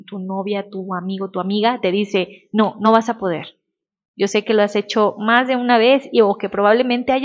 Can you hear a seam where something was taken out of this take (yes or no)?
no